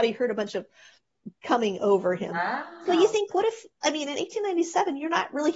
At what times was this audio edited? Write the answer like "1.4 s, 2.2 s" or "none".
1.4 s, 3.3 s